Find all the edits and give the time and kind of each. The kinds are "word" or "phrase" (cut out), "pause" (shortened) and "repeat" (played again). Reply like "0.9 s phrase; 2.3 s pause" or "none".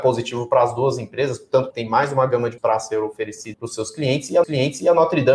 1.7 s phrase; 2.6 s word; 3.5 s word; 4.4 s repeat